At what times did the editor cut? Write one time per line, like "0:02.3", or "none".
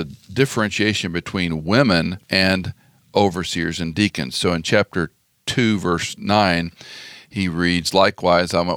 none